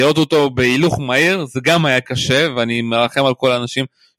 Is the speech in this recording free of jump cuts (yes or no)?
yes